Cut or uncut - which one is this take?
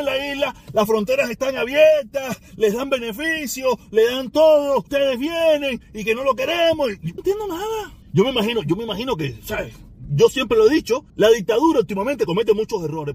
cut